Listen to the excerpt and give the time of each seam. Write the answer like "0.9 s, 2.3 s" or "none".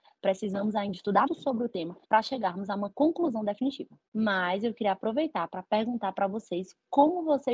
1.3 s, 2.0 s, 4.1 s